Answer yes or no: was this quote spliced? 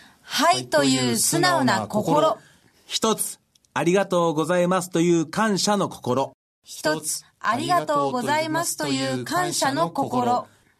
no